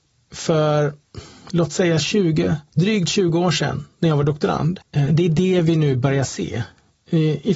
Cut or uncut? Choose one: cut